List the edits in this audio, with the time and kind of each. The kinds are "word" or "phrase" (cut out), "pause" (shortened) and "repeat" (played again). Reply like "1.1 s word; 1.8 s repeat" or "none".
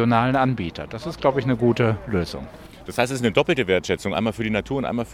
none